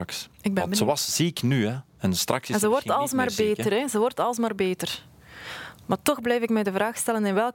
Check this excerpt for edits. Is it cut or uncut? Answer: cut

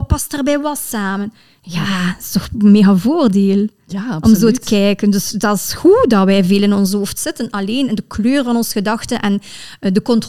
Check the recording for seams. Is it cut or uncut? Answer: uncut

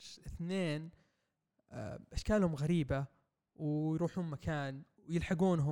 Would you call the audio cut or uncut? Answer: uncut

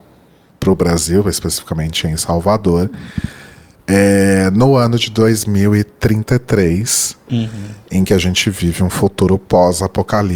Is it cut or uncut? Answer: uncut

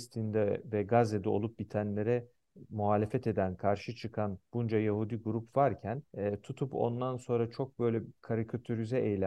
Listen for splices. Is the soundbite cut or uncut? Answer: cut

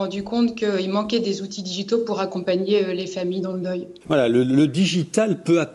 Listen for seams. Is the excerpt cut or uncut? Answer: cut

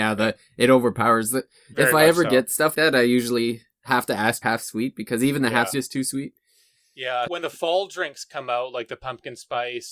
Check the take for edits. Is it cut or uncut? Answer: cut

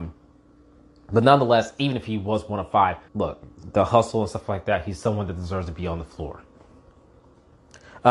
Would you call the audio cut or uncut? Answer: cut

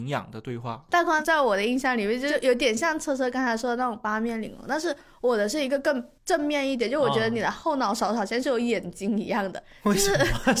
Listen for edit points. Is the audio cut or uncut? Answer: cut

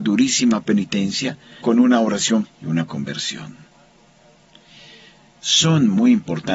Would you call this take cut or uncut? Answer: cut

